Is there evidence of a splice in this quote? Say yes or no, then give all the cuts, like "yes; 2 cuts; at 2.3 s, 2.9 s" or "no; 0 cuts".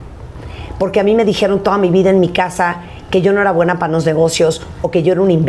no; 0 cuts